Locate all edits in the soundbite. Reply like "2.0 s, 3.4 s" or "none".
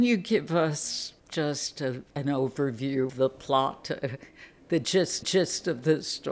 1.2 s, 2.1 s, 3.1 s, 5.2 s